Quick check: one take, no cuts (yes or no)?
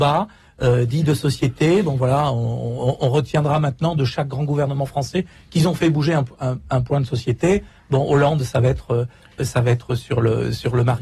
yes